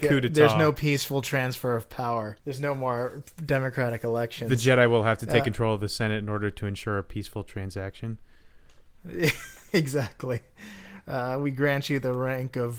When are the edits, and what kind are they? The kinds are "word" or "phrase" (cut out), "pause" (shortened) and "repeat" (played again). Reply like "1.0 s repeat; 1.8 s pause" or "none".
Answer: 2.4 s pause